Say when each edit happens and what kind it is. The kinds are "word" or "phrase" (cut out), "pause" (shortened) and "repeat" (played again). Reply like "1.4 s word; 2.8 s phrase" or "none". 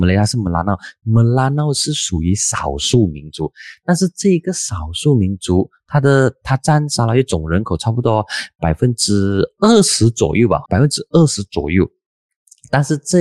10.7 s word